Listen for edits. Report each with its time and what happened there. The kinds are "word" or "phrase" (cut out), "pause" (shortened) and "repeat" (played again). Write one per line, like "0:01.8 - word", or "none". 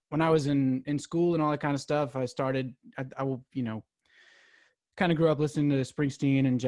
none